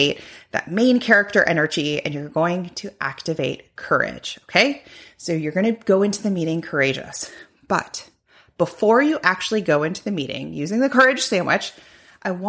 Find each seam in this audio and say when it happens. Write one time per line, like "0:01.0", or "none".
none